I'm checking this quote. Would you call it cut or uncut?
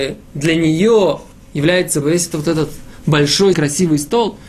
cut